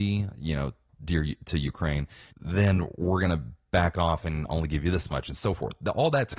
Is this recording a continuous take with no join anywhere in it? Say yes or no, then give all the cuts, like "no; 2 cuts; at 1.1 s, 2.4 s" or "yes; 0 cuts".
no; 1 cut; at 2.3 s